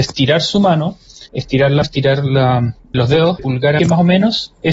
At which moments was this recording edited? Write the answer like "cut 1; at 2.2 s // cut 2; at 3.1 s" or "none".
cut 1; at 1.3 s // cut 2; at 1.8 s // cut 3; at 2.9 s // cut 4; at 3.4 s // cut 5; at 3.8 s